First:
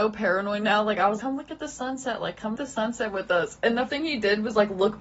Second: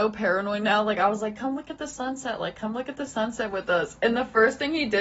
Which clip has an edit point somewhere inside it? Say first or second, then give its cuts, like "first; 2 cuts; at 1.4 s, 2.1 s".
first; 3 cuts; at 1.2 s, 2.5 s, 3.9 s